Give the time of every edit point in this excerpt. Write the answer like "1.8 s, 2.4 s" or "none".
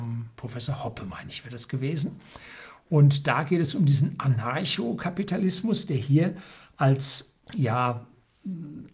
7.4 s